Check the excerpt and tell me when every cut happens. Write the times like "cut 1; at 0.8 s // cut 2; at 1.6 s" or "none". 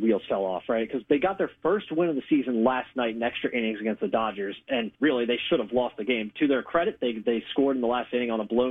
cut 1; at 4.9 s